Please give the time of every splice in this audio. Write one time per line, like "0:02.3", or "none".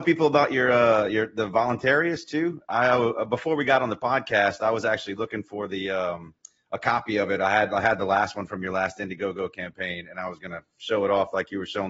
none